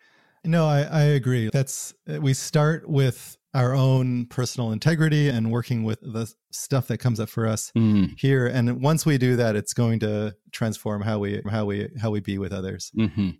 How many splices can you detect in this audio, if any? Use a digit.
4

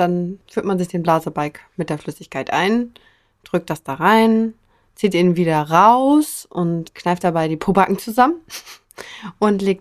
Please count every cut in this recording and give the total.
0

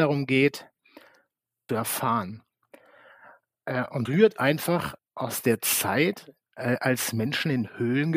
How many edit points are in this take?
3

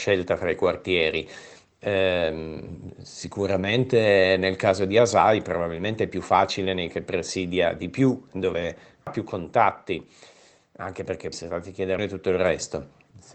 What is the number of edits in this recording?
3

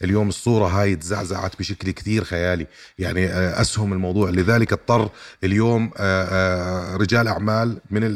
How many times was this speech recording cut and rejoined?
0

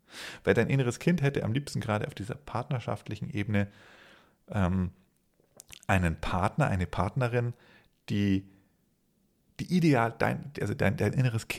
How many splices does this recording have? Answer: 0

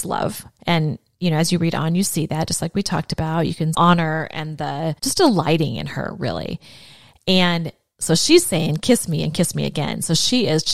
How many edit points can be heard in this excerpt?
2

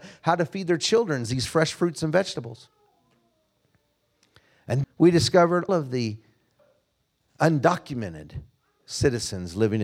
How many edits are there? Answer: 2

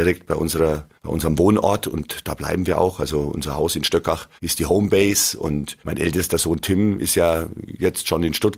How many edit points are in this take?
3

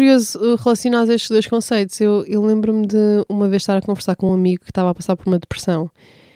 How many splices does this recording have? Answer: 0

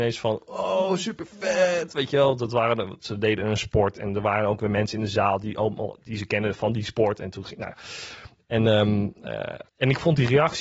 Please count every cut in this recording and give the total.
1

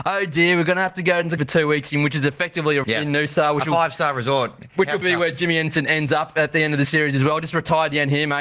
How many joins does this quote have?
3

